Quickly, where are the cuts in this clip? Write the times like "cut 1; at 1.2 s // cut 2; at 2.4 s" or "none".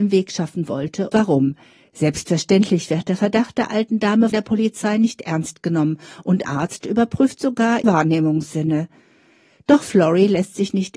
cut 1; at 1.1 s // cut 2; at 4.3 s // cut 3; at 6.4 s // cut 4; at 7.8 s